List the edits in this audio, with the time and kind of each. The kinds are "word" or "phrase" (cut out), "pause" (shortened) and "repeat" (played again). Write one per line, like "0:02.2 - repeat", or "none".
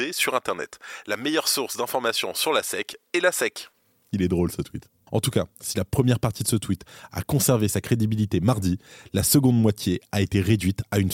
none